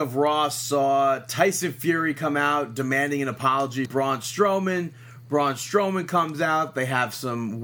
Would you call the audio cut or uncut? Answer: cut